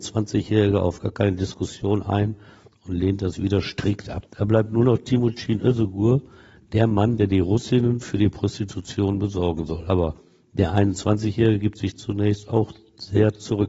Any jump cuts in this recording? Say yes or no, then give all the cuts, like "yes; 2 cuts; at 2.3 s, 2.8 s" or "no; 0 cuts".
no; 0 cuts